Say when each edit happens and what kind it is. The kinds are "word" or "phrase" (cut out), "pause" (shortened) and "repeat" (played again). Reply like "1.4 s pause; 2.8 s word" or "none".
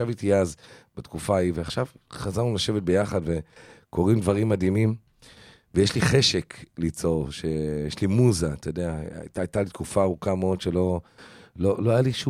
none

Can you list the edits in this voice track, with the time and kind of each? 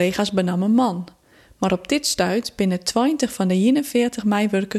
none

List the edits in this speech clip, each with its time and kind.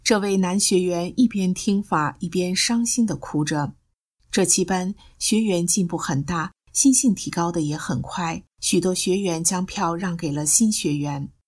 8.5 s pause

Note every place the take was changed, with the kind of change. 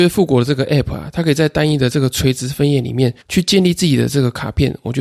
3.2 s pause

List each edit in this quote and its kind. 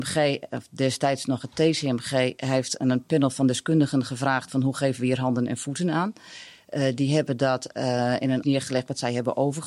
8.4 s word

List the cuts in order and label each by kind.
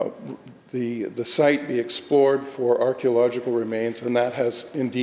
none

